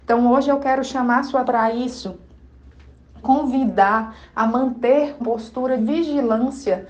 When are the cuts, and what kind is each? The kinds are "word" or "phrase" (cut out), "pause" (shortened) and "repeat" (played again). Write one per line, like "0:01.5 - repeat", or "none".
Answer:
0:01.4 - word
0:03.2 - word
0:05.2 - word
0:05.8 - word